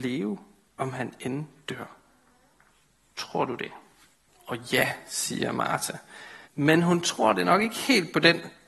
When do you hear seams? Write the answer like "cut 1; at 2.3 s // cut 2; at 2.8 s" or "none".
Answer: cut 1; at 4.3 s // cut 2; at 6.4 s